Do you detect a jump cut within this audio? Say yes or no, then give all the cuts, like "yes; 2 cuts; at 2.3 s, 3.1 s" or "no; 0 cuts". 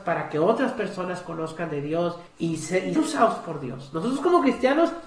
yes; 2 cuts; at 2.3 s, 3.0 s